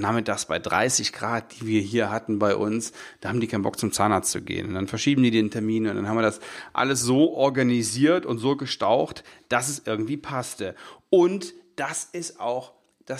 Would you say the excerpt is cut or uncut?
uncut